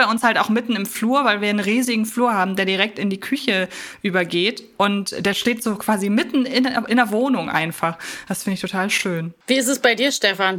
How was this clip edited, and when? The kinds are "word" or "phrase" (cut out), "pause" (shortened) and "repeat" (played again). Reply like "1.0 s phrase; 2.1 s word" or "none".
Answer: 9.4 s pause